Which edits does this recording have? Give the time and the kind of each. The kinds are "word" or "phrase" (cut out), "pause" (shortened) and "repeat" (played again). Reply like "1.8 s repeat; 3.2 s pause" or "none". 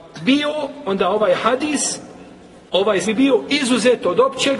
3.0 s word